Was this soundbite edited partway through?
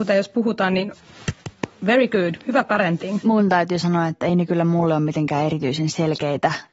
no; 0 cuts

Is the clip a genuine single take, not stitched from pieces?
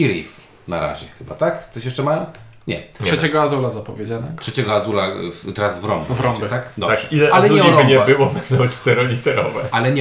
yes; 0 cuts

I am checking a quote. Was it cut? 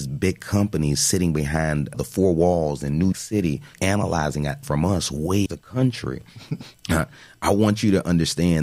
yes; 5 cuts; at 1.9 s, 3.1 s, 3.7 s, 4.6 s, 5.5 s

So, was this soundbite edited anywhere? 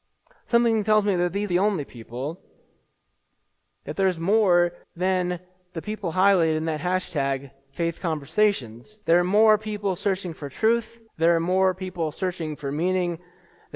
yes; 4 cuts; at 1.5 s, 4.8 s, 9.0 s, 11.1 s

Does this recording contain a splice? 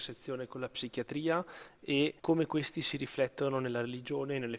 yes; 1 cut; at 2.2 s

